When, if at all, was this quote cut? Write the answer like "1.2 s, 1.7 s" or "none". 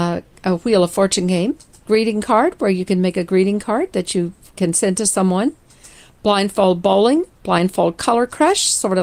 1.9 s